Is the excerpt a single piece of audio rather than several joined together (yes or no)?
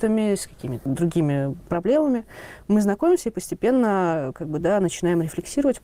yes